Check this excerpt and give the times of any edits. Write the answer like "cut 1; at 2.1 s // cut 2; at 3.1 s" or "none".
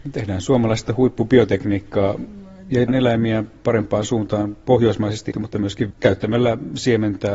cut 1; at 2.9 s // cut 2; at 5.3 s // cut 3; at 5.9 s